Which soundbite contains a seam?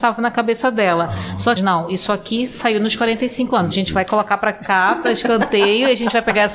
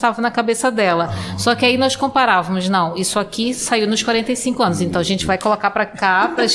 first; 2 cuts; at 1.6 s, 3.7 s

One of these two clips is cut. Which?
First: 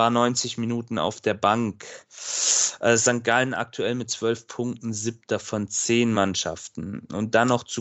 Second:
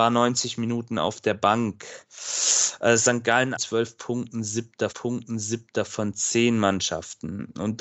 second; 2 cuts; at 3.6 s, 4.9 s

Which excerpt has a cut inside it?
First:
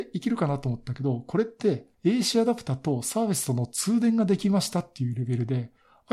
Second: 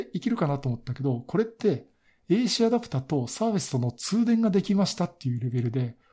first; 1 cut; at 1.9 s

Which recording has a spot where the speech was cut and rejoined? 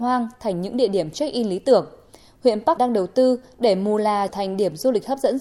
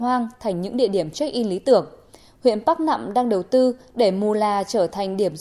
first; 2 cuts; at 2.8 s, 4.3 s

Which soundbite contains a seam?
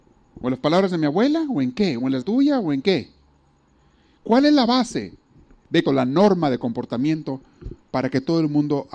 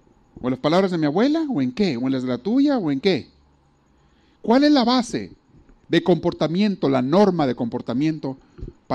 first; 2 cuts; at 2.2 s, 5.9 s

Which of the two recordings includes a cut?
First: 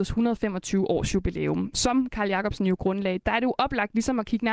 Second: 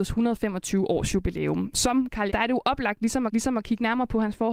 second; 2 cuts; at 2.3 s, 3.3 s

